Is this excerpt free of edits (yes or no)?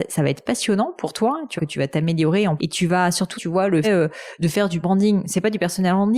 no